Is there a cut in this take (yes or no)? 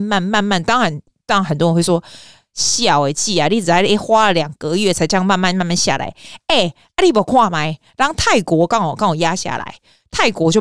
no